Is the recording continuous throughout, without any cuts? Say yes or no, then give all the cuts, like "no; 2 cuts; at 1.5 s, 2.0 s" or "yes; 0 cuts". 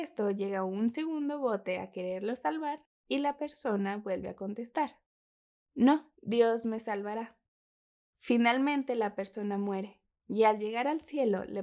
no; 1 cut; at 6.1 s